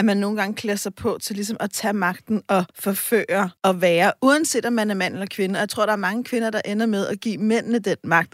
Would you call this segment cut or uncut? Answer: cut